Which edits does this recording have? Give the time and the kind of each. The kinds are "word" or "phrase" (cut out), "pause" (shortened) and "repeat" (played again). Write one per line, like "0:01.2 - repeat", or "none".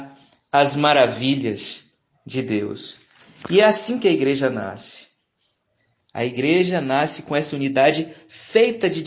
none